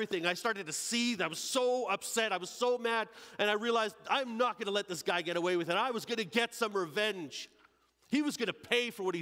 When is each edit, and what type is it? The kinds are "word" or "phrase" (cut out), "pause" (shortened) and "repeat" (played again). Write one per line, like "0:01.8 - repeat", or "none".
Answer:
none